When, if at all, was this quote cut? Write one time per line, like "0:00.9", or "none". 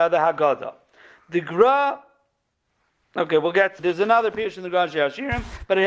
0:03.8